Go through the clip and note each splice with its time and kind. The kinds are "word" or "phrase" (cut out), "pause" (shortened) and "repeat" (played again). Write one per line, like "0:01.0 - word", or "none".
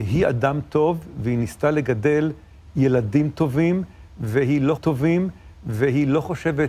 0:04.8 - repeat